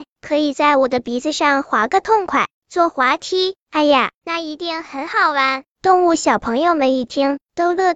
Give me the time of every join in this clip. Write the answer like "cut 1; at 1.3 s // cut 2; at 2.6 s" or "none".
cut 1; at 2.5 s